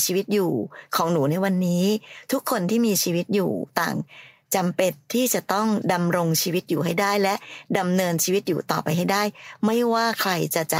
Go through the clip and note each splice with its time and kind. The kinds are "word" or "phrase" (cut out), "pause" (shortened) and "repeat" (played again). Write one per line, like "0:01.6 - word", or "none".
none

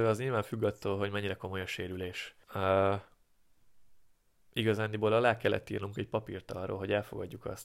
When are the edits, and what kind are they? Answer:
0:02.4 - pause

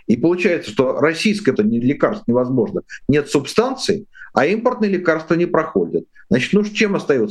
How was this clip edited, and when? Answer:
0:01.5 - word

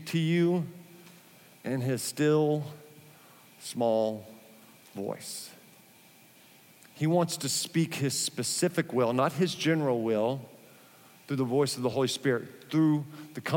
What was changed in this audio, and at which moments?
none

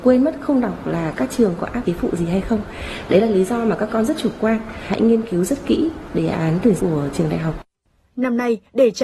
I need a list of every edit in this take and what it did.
0:01.8 - word
0:06.8 - word

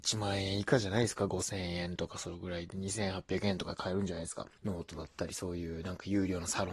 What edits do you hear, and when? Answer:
0:04.6 - pause

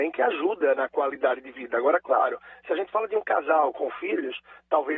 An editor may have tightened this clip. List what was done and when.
none

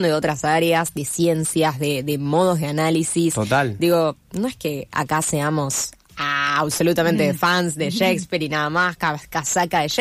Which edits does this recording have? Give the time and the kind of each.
none

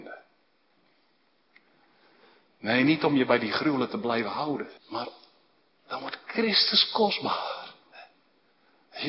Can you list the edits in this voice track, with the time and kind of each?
0:04.8 - pause

